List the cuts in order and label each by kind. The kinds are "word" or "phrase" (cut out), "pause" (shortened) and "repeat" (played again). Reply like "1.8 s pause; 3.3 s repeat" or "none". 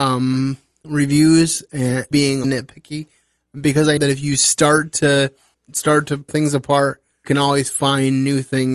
2.1 s word; 2.4 s word; 4.0 s word; 5.5 s word; 6.3 s word; 7.2 s word

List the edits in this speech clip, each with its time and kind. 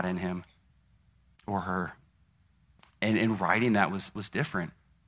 none

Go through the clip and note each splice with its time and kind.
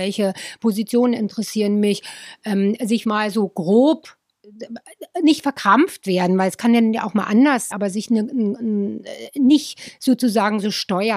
3.0 s word; 7.7 s word

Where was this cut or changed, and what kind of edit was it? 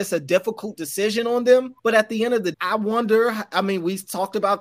1.8 s pause; 2.5 s word

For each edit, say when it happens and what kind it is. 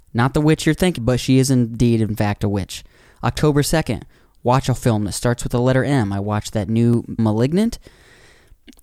1.0 s word; 4.8 s word; 7.2 s word

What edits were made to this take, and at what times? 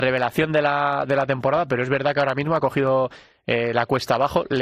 none

